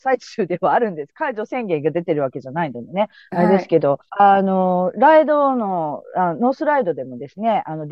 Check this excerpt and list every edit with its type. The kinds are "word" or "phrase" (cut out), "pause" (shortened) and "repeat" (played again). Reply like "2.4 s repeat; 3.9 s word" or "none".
4.1 s pause